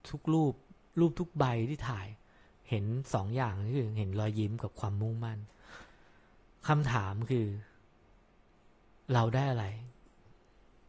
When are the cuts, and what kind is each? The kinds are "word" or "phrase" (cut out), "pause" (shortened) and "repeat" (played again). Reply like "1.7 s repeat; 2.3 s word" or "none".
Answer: none